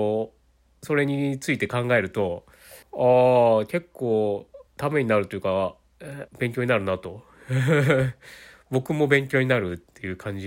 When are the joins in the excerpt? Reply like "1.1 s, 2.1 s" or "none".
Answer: 2.8 s, 4.7 s, 6.3 s

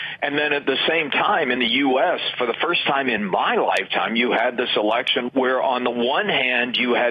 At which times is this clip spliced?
none

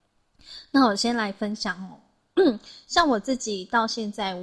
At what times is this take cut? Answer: none

